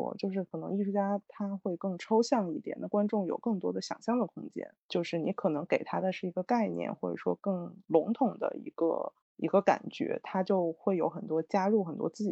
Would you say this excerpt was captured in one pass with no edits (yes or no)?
no